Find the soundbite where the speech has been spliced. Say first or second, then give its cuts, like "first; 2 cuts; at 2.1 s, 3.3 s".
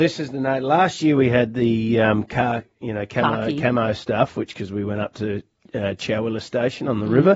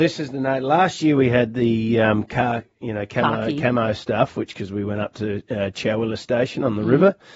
second; 1 cut; at 5.5 s